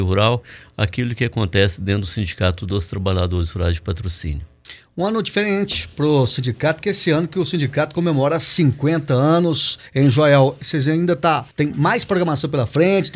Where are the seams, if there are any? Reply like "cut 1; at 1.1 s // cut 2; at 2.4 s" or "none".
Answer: cut 1; at 9.9 s // cut 2; at 11.5 s

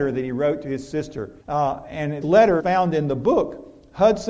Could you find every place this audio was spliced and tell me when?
cut 1; at 1.4 s // cut 2; at 2.2 s // cut 3; at 2.6 s

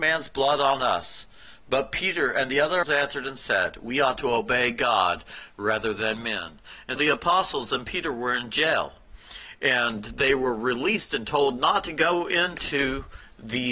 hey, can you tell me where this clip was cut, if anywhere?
cut 1; at 2.8 s // cut 2; at 7.0 s

